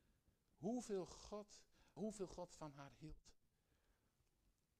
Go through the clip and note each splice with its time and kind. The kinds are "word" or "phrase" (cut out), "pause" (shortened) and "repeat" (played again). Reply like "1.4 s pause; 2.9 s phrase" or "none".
2.0 s word